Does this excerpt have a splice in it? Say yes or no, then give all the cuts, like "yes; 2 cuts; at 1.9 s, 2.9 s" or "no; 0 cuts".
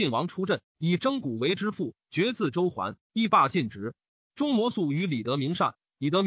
no; 0 cuts